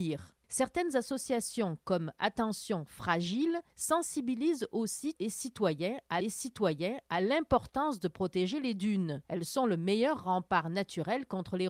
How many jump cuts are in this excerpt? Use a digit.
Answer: 4